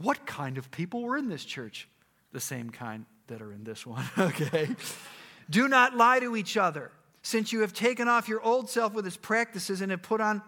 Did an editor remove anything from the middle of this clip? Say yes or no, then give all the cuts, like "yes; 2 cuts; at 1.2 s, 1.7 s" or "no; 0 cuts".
no; 0 cuts